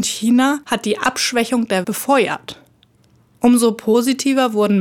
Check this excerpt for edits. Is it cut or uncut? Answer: cut